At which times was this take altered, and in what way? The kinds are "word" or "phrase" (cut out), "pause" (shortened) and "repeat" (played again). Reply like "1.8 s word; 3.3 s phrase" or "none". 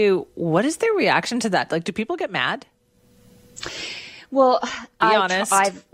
none